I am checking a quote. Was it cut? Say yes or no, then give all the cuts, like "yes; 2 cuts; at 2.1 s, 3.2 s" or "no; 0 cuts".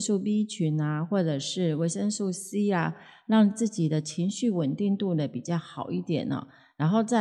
no; 0 cuts